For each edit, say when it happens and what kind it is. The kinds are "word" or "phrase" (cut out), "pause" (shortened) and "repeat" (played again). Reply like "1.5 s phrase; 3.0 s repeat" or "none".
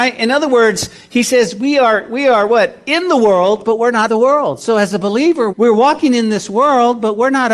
4.1 s word; 5.5 s word